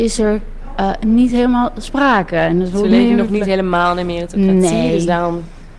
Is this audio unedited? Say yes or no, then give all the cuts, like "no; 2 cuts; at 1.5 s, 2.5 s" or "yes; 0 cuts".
yes; 0 cuts